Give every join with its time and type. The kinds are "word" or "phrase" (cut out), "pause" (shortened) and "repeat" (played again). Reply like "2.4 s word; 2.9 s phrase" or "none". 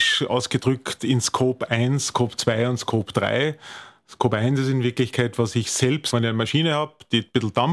6.1 s phrase